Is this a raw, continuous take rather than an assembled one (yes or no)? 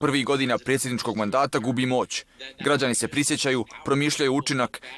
yes